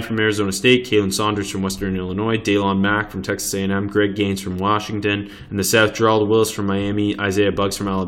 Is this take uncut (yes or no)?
yes